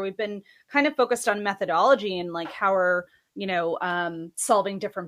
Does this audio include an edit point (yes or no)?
no